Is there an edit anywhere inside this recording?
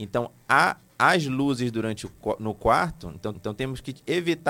yes; 1 cut; at 3.3 s

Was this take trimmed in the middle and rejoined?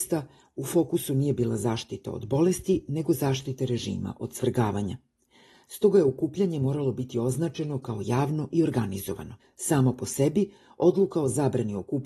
yes; 1 cut; at 9.4 s

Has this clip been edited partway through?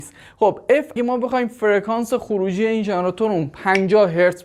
yes; 1 cut; at 1.0 s

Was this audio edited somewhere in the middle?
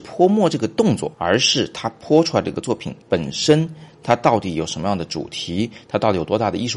yes; 2 cuts; at 1.1 s, 3.0 s

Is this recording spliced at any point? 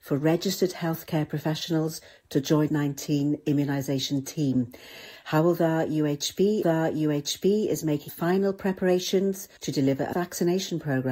yes; 5 cuts; at 2.7 s, 6.6 s, 8.1 s, 9.6 s, 10.1 s

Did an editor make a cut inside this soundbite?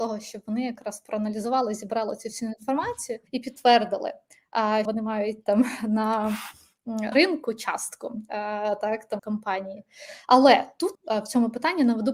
yes; 5 cuts; at 3.3 s, 4.9 s, 7.1 s, 9.2 s, 10.9 s

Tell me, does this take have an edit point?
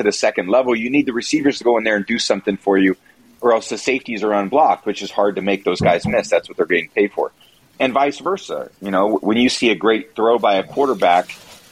no; 0 cuts

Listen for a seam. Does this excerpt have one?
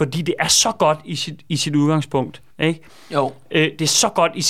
yes; 1 cut; at 2.5 s

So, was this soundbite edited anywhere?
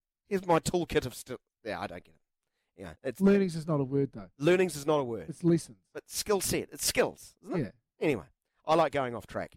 yes; 1 cut; at 3.0 s

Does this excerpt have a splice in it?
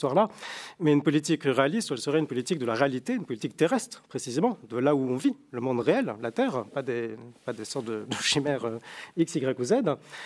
no; 0 cuts

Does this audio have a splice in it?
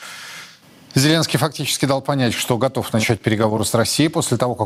no; 0 cuts

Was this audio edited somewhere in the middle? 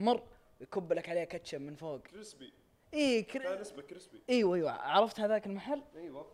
no; 0 cuts

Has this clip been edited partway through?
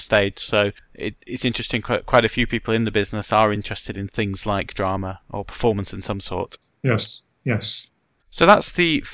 no; 0 cuts

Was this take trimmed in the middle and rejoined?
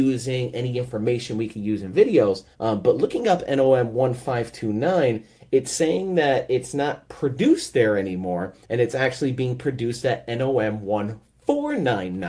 yes; 2 cuts; at 2.5 s, 8.6 s

